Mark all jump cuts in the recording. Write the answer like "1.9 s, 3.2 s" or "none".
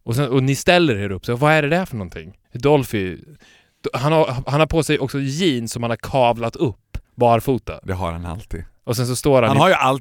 2.4 s, 7.0 s